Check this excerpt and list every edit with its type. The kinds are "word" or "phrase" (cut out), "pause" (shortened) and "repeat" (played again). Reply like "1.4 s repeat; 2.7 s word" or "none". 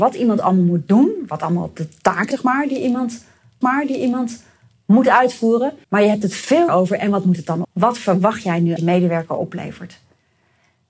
2.3 s word; 3.6 s repeat; 5.8 s pause; 6.7 s word; 7.6 s word; 8.8 s phrase